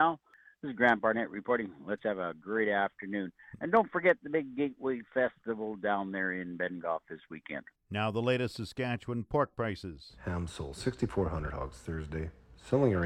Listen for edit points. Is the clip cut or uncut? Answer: cut